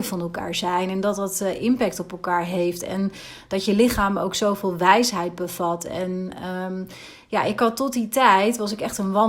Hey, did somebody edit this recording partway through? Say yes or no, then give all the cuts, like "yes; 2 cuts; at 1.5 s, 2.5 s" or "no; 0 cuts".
no; 0 cuts